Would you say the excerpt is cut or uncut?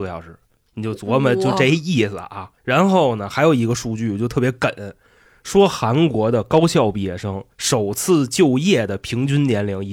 cut